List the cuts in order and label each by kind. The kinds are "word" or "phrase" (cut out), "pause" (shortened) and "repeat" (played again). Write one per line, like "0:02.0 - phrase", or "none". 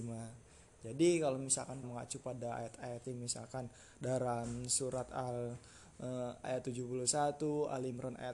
0:01.8 - word
0:03.0 - phrase
0:06.4 - word